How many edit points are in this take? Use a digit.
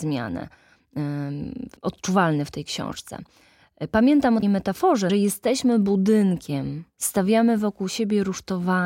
3